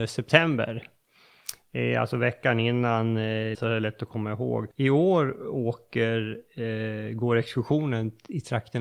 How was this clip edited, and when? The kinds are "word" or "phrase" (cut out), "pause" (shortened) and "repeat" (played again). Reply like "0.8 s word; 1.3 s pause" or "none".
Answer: 3.5 s word; 4.7 s pause

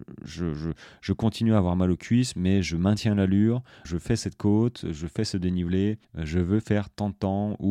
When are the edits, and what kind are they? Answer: 3.8 s word; 6.0 s pause

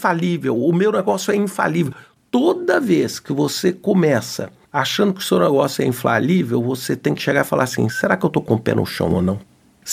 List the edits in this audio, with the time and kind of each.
none

